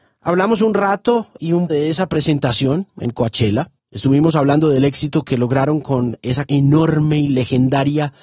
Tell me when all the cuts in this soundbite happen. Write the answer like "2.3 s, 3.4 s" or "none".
1.7 s, 3.8 s, 6.5 s